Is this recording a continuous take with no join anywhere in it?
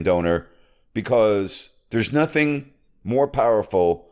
yes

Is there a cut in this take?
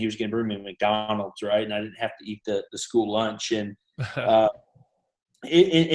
no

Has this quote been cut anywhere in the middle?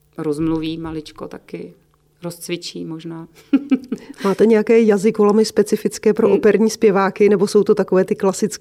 no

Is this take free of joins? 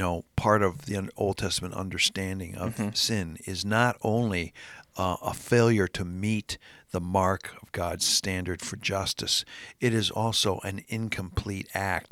yes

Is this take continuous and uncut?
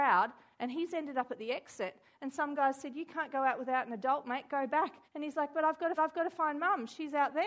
no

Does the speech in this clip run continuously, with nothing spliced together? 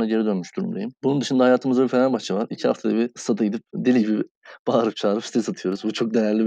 no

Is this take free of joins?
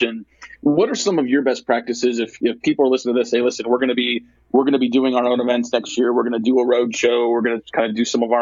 yes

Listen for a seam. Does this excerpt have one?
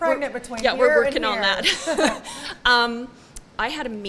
no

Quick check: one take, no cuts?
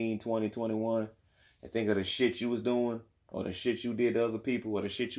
yes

